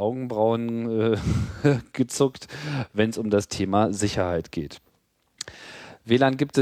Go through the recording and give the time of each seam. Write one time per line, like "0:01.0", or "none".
none

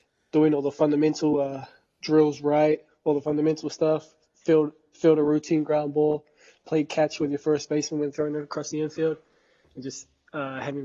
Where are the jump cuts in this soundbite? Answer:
none

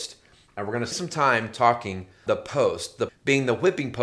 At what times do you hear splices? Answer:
0:00.9
0:02.3
0:03.1

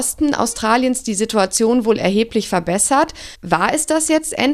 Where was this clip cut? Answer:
0:03.3

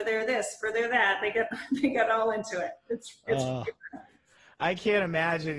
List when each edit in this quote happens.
none

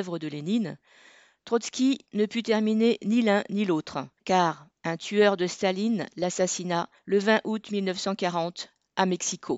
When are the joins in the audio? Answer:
0:04.2
0:07.0

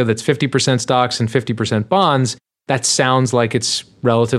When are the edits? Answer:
none

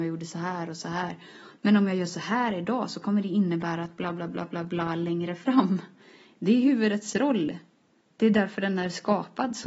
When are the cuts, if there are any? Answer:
none

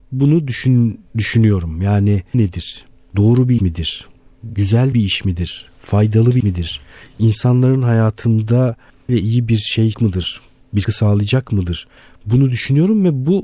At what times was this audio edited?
0:02.3
0:03.6
0:04.9
0:06.4
0:09.1
0:09.9
0:10.8

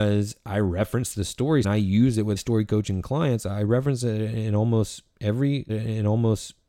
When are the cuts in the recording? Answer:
0:01.6
0:02.4
0:05.7

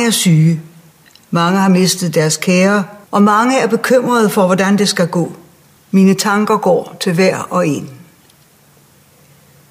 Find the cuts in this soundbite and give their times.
0:03.0
0:05.6

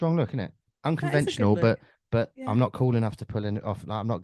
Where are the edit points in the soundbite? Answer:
none

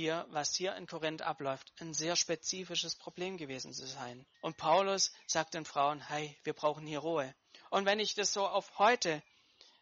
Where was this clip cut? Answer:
0:04.3

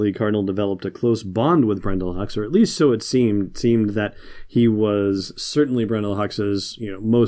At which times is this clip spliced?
none

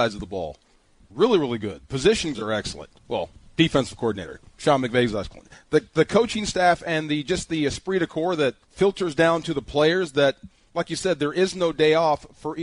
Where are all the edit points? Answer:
0:02.3
0:03.0
0:08.6

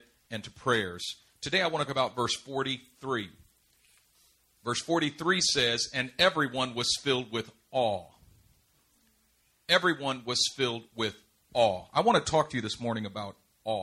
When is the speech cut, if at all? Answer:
0:01.9

